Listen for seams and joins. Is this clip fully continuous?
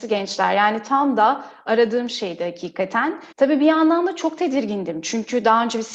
no; 1 cut; at 3.3 s

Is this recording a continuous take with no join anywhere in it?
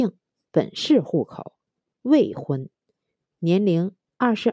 yes; 0 cuts

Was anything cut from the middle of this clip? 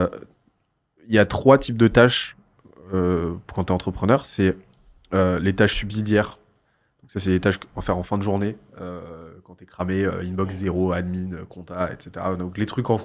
no; 0 cuts

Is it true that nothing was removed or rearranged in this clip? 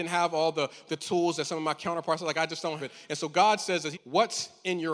no; 2 cuts; at 2.8 s, 3.9 s

